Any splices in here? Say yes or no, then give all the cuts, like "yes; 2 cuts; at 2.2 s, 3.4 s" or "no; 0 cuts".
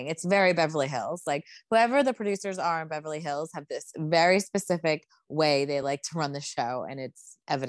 no; 0 cuts